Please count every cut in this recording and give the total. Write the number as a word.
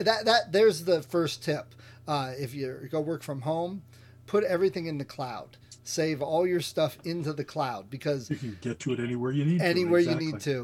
zero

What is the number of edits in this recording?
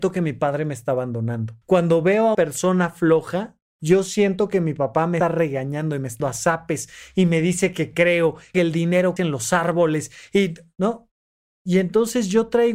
eight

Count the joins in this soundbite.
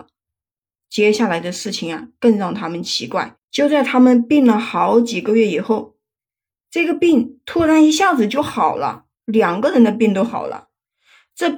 one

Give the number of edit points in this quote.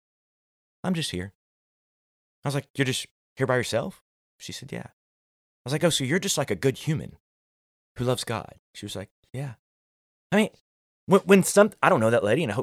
zero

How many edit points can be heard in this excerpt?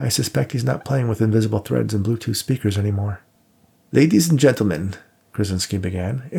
zero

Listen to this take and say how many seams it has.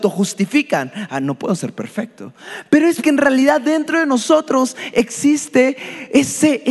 one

